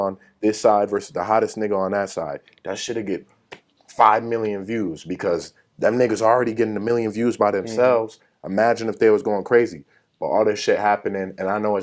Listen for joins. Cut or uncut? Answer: uncut